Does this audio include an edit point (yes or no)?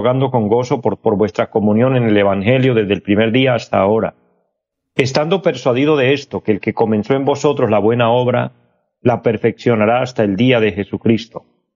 yes